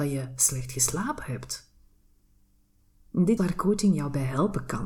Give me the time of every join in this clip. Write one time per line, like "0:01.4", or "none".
0:03.4